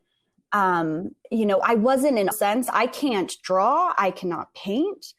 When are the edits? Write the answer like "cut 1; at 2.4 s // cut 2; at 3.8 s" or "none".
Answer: cut 1; at 1.2 s // cut 2; at 2.3 s